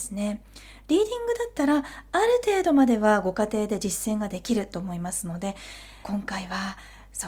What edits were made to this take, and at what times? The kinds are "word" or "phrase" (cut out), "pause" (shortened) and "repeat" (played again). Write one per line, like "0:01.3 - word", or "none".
0:06.0 - phrase